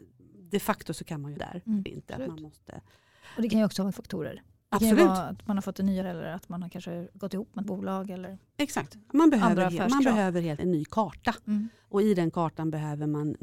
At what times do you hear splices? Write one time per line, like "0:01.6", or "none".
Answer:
0:01.4
0:01.9
0:03.9
0:06.0
0:07.6
0:10.6